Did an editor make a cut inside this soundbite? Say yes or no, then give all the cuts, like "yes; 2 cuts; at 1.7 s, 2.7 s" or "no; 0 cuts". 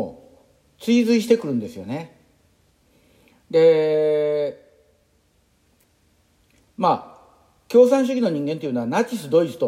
no; 0 cuts